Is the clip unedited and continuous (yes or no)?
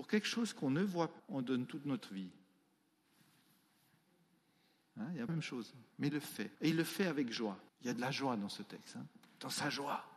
no